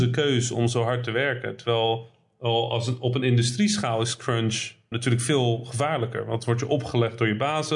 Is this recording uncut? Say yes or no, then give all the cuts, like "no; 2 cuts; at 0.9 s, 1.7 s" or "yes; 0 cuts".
no; 1 cut; at 4.9 s